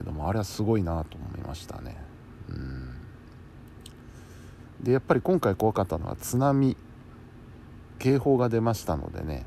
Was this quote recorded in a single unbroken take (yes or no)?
yes